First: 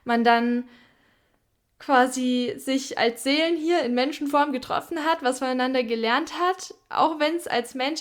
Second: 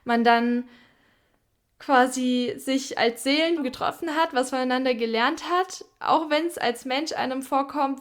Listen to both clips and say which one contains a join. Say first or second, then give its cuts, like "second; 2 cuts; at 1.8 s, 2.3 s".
second; 1 cut; at 3.6 s